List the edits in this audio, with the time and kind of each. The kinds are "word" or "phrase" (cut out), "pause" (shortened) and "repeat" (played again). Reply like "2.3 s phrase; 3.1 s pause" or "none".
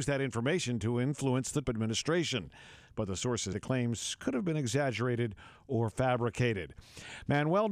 1.6 s word; 3.5 s word